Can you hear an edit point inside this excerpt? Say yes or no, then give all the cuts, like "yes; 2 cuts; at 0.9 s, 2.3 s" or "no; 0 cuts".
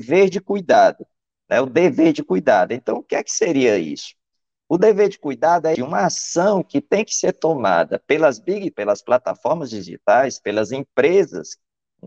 yes; 2 cuts; at 5.7 s, 8.7 s